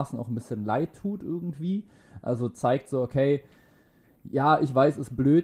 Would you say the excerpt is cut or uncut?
uncut